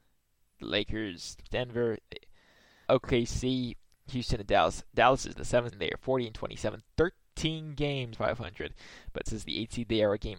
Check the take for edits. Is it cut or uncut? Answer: cut